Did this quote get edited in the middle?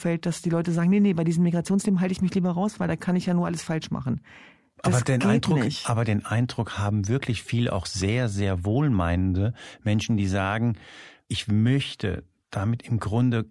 no; 0 cuts

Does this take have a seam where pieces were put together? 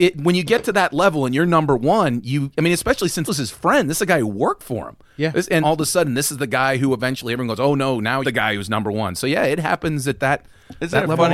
yes; 3 cuts; at 3.3 s, 5.6 s, 8.2 s

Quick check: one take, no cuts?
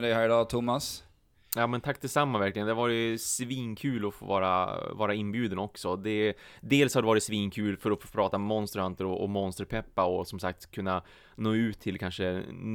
yes; 0 cuts

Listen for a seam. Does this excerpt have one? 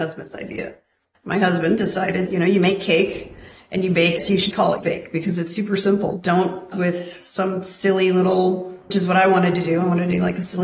yes; 6 cuts; at 2.3 s, 4.2 s, 4.5 s, 4.8 s, 6.7 s, 8.9 s

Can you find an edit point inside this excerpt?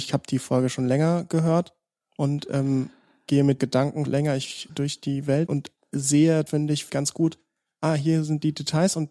yes; 6 cuts; at 3.6 s, 4.1 s, 4.7 s, 5.5 s, 6.5 s, 6.9 s

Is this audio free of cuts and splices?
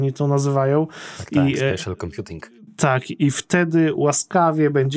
yes; 0 cuts

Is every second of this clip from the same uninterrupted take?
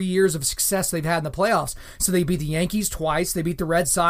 yes; 0 cuts

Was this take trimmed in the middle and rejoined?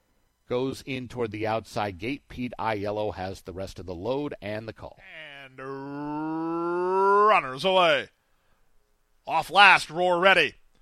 no; 0 cuts

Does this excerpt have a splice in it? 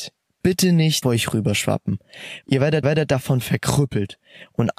yes; 3 cuts; at 1.0 s, 2.4 s, 2.8 s

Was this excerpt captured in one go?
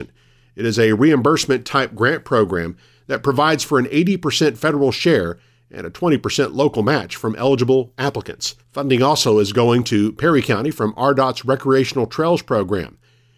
no; 1 cut; at 8.6 s

